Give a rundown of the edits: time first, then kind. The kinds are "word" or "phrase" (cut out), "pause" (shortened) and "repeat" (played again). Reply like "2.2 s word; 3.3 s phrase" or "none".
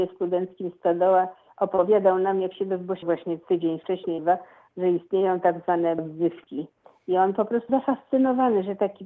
3.0 s word; 4.2 s word; 6.0 s word; 7.7 s word